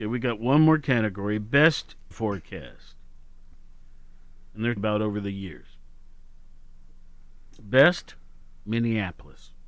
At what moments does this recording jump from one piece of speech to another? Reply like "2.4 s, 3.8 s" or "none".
2.1 s, 4.8 s